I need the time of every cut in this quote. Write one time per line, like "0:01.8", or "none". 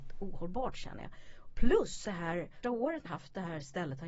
0:02.0
0:02.6
0:03.1